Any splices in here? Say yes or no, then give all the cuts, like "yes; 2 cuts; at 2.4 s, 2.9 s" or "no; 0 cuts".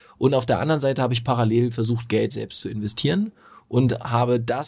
no; 0 cuts